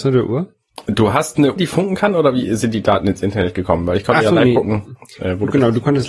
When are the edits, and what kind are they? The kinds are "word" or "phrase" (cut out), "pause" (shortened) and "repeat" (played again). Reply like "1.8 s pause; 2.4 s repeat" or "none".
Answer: 1.6 s word